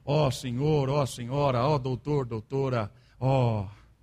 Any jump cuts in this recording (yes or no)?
no